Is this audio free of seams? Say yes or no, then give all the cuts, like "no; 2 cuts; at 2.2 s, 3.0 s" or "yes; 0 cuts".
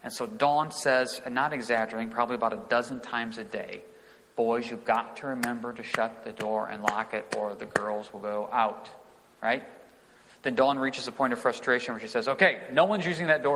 yes; 0 cuts